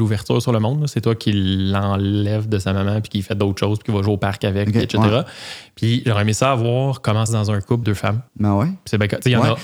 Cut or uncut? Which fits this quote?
cut